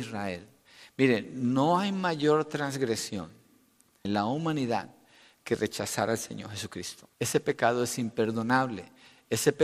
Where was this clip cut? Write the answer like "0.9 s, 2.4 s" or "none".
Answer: 4.0 s, 7.1 s